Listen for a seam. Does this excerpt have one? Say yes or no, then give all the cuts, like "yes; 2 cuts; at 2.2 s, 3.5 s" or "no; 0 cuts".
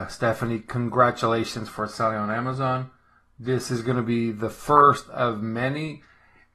no; 0 cuts